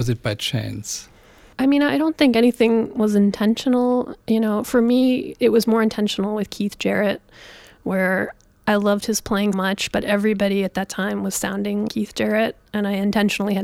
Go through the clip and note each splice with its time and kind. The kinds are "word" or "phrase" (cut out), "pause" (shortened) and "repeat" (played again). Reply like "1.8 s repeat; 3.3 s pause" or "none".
9.5 s word; 11.9 s word